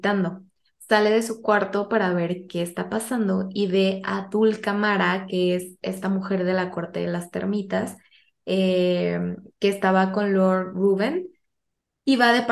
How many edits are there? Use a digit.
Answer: 0